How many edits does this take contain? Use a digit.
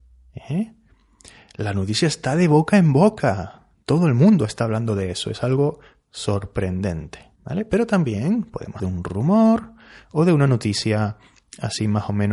2